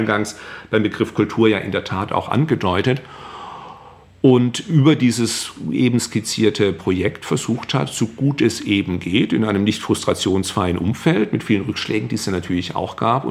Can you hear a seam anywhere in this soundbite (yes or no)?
no